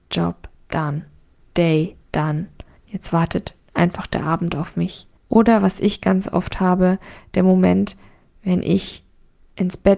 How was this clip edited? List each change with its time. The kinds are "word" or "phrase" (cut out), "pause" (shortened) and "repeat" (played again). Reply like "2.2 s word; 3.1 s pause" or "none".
2.0 s pause; 5.2 s pause